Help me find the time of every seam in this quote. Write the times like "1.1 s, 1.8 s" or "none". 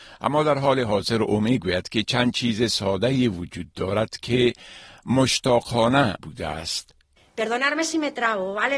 6.2 s